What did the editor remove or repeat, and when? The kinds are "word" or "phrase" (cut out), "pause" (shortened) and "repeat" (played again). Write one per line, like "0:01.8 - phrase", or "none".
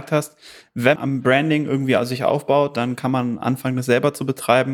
0:01.0 - word